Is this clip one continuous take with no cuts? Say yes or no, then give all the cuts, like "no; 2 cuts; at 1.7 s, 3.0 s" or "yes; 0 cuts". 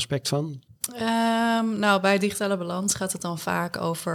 yes; 0 cuts